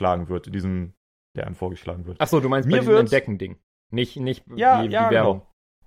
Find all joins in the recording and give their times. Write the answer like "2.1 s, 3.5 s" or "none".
1.3 s